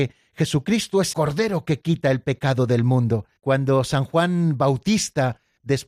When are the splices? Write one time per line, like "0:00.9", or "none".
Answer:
0:01.1
0:03.4